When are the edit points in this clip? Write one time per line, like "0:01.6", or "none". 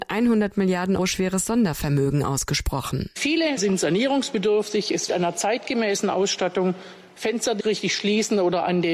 0:01.0
0:03.6
0:05.1
0:07.6